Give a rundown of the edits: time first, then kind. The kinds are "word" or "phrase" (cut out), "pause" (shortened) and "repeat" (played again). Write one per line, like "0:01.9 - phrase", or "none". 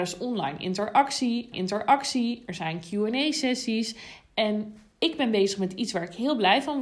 0:01.5 - repeat